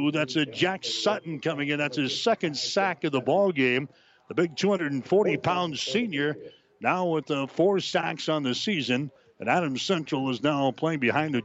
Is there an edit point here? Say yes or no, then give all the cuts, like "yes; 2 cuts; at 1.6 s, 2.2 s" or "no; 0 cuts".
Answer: no; 0 cuts